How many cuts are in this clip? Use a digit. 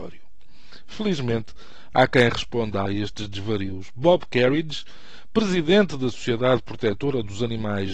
1